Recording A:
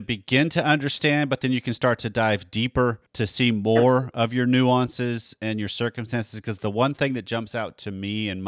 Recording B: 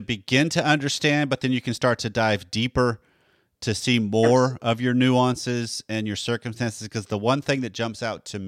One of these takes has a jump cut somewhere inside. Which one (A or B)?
A